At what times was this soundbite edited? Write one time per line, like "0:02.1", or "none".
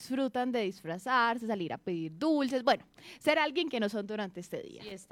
none